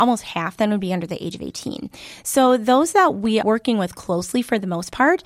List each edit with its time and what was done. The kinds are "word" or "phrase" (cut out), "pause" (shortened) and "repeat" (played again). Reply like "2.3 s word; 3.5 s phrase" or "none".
3.4 s word